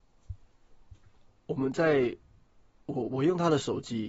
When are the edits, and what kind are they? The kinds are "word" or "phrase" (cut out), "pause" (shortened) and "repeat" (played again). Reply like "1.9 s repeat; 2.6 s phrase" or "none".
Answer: none